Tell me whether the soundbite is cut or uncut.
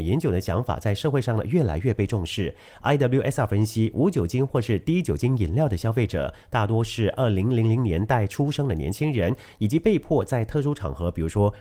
uncut